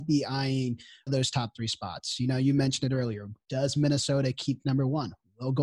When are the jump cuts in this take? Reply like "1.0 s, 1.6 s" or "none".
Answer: 1.1 s, 4.6 s